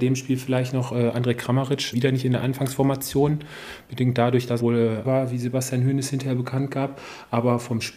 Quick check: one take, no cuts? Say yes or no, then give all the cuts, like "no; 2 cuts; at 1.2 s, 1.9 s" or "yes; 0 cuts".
no; 3 cuts; at 1.9 s, 4.6 s, 5.0 s